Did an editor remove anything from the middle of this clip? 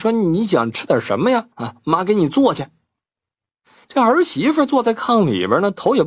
yes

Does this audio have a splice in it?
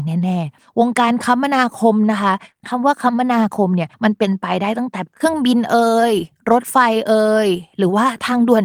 yes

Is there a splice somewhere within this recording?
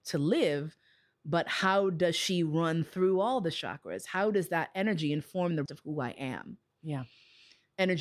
yes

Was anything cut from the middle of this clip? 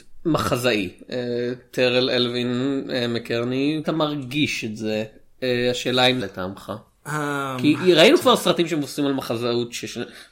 yes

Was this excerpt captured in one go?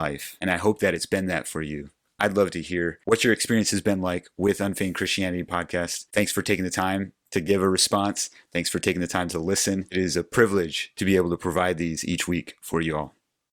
yes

